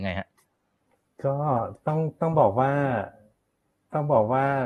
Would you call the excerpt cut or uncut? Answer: uncut